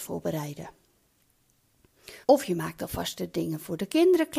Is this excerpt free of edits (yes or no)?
no